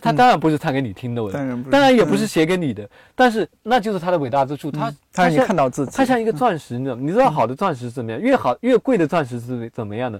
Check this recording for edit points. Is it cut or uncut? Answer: uncut